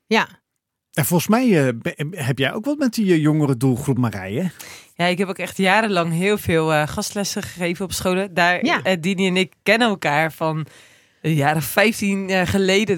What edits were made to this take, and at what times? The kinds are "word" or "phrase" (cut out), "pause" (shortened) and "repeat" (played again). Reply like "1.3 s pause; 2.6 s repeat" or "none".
none